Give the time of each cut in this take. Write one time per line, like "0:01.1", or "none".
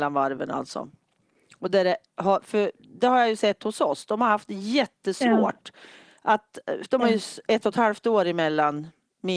none